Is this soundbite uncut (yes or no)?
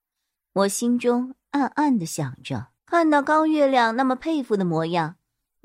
no